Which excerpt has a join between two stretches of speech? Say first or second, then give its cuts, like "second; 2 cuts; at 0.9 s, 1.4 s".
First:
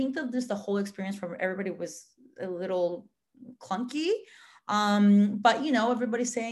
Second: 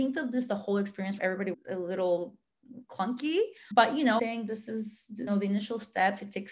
second; 5 cuts; at 1.2 s, 1.5 s, 3.7 s, 4.2 s, 5.3 s